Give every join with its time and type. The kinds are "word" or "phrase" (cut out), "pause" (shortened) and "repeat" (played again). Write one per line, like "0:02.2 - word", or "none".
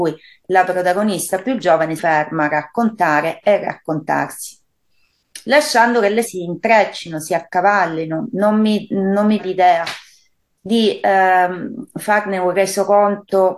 0:02.0 - word
0:06.2 - word
0:09.4 - word